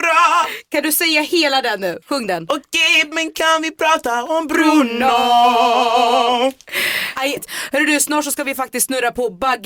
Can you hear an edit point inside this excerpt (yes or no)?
yes